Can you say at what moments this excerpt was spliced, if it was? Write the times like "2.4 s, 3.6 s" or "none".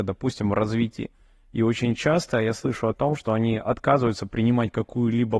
none